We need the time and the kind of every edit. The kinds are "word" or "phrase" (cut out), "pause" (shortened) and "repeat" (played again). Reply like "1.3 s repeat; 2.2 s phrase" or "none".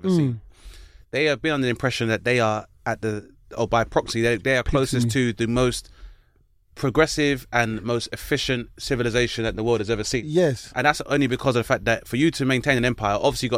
none